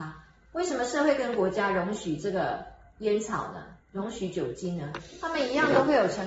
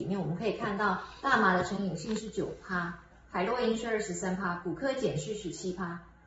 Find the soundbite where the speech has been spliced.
first; 1 cut; at 3.8 s

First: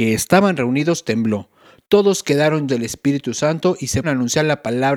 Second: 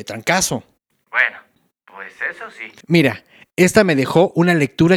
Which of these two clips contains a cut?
first; 2 cuts; at 2.7 s, 4.0 s

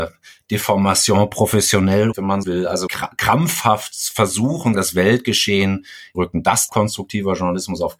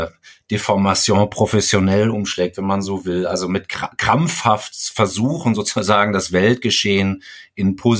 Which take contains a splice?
first; 6 cuts; at 2.1 s, 2.4 s, 2.9 s, 4.7 s, 6.1 s, 6.7 s

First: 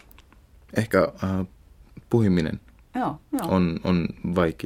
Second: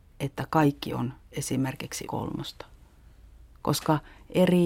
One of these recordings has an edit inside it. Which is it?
second; 1 cut; at 2.0 s

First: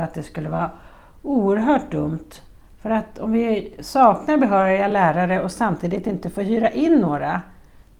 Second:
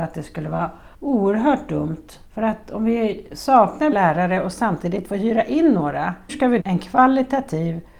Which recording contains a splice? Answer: second; 6 cuts; at 0.9 s, 2.3 s, 3.9 s, 5.0 s, 6.3 s, 6.6 s

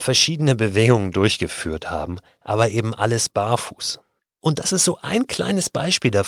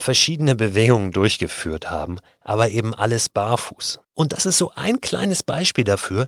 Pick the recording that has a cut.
second; 1 cut; at 4.0 s

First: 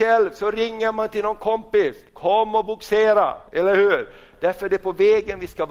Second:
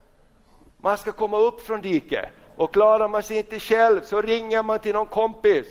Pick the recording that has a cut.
first; 2 cuts; at 2.1 s, 3.5 s

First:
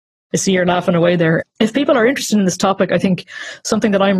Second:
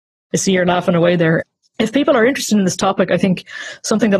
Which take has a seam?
first; 1 cut; at 1.5 s

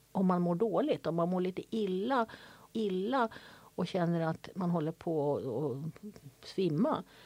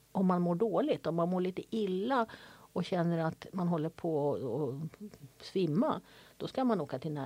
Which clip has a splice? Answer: first; 1 cut; at 2.7 s

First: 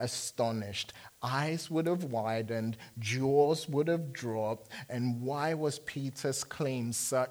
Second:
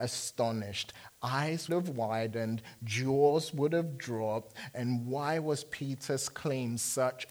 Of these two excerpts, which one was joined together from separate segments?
second; 1 cut; at 1.7 s

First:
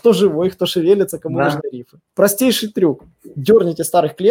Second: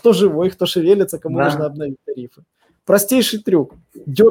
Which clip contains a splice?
first; 2 cuts; at 1.6 s, 2.1 s

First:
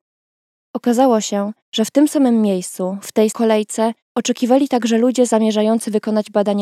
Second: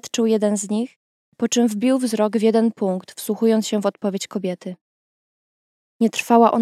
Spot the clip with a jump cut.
first; 3 cuts; at 1.6 s, 3.3 s, 4.0 s

